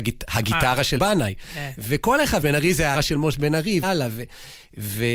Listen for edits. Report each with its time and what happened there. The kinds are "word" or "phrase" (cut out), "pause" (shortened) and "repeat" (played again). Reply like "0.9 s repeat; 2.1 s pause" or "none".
1.0 s word; 2.4 s word; 2.9 s word; 3.8 s word